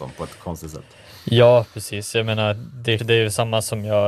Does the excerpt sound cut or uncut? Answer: cut